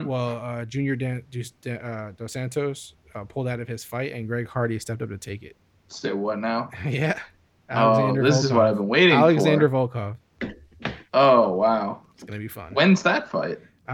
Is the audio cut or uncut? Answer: cut